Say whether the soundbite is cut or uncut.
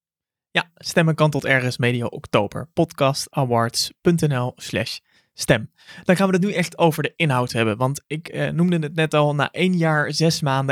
uncut